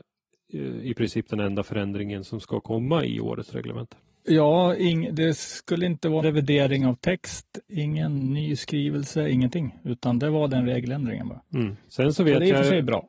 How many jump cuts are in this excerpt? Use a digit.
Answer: 2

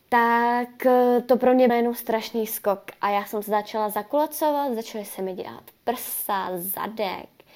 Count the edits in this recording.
1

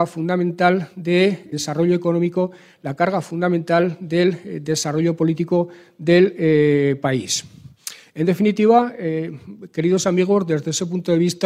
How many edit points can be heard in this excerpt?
1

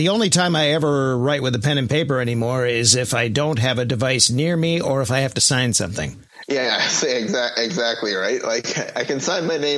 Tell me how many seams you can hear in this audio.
0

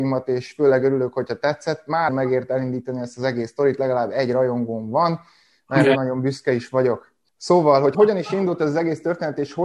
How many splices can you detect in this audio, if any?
2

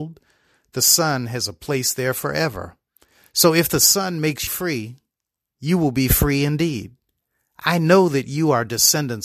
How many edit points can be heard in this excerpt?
1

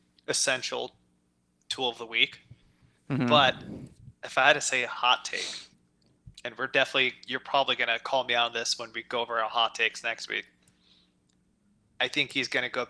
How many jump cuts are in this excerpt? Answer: 0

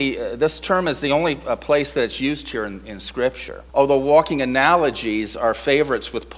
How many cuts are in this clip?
1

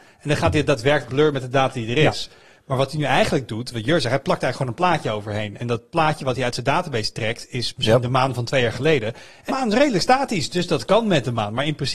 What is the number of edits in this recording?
2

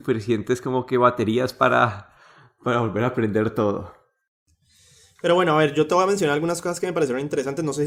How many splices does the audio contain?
0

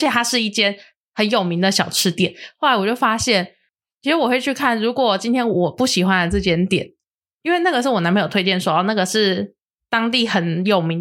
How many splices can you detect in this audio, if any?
0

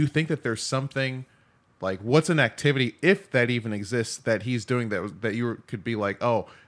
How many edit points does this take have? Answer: 0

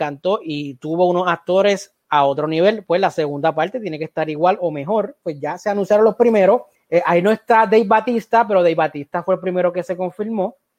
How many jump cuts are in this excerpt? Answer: 1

